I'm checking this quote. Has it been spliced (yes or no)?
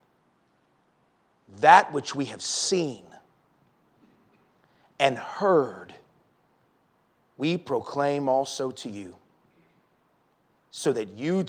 no